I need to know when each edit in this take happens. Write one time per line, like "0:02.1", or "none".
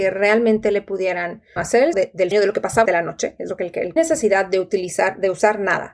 0:01.6
0:01.9
0:02.3
0:02.9
0:04.0